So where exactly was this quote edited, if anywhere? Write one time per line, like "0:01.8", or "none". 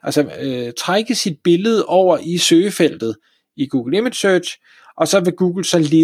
none

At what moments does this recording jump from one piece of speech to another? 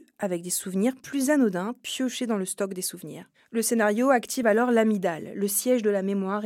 none

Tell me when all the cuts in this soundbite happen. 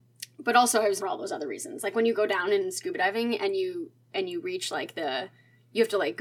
0:01.0

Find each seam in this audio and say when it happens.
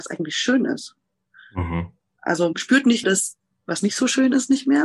0:02.5
0:03.0

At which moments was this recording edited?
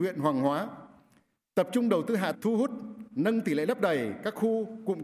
0:02.3

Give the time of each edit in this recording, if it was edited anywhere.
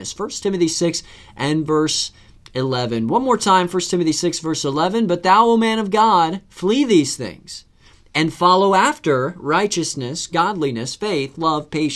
none

